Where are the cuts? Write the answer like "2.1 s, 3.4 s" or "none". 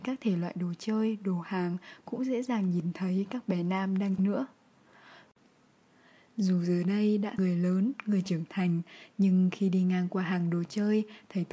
4.2 s, 7.4 s